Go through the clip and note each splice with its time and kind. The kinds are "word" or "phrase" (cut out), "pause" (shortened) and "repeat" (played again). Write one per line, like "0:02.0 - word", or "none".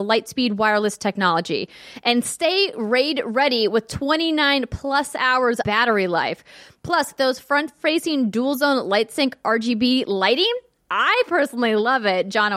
0:05.6 - word